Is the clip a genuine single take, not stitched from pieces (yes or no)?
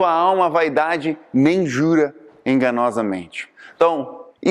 yes